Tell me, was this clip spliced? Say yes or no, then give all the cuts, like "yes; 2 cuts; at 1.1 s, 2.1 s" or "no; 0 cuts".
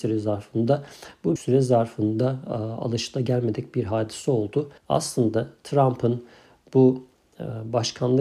yes; 2 cuts; at 1.4 s, 4.8 s